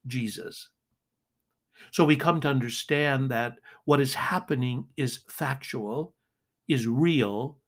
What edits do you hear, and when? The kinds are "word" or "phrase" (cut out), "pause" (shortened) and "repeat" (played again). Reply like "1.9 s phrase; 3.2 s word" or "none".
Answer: none